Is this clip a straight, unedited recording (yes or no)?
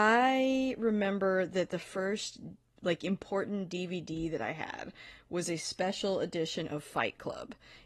yes